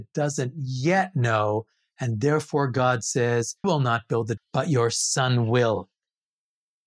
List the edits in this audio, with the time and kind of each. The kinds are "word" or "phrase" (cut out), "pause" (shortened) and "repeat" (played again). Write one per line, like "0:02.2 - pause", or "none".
0:03.6 - word
0:04.4 - word